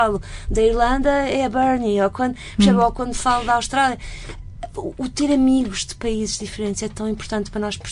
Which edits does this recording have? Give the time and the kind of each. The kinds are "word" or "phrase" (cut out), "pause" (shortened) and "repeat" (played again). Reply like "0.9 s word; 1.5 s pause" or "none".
none